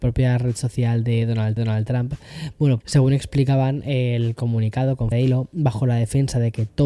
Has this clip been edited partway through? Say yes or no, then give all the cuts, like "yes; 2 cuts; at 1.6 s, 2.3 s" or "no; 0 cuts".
yes; 3 cuts; at 1.6 s, 2.8 s, 5.1 s